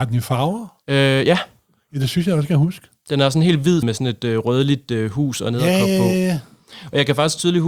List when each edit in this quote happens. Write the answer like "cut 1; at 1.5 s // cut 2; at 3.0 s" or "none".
cut 1; at 3.8 s